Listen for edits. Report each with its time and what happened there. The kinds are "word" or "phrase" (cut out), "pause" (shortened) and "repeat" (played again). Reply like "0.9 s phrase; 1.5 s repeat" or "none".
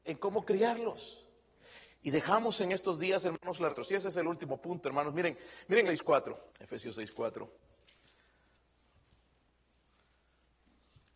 3.7 s phrase; 5.9 s word; 6.5 s pause